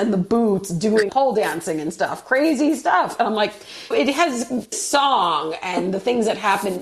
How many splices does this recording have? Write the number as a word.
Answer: three